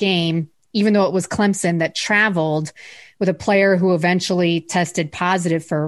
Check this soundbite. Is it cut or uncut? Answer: uncut